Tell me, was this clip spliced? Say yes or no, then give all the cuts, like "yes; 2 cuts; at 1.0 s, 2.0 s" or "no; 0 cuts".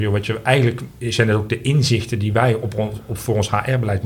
no; 0 cuts